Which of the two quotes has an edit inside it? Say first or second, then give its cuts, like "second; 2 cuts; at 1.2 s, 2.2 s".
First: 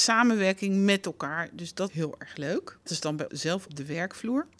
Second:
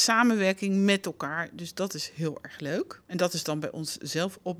first; 4 cuts; at 1.9 s, 2.9 s, 3.3 s, 3.7 s